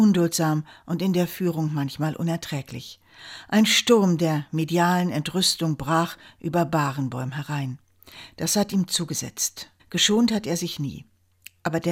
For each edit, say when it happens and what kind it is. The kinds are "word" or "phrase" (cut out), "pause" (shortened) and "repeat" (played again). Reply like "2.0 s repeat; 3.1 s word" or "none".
9.8 s pause